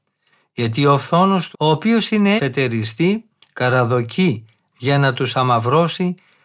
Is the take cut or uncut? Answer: cut